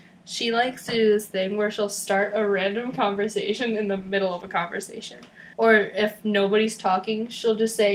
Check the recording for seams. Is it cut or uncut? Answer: cut